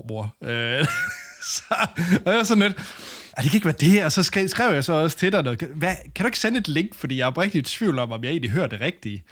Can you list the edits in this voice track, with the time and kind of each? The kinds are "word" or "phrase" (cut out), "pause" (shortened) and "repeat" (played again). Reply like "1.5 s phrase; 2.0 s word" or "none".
3.3 s pause